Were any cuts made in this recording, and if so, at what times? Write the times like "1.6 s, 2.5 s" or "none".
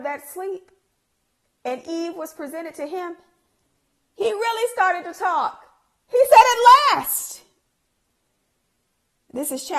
none